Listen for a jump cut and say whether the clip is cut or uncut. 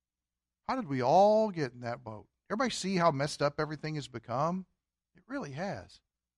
uncut